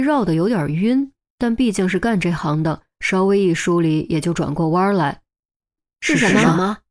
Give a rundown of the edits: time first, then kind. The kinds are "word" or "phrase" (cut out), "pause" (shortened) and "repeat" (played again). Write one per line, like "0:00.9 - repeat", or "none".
none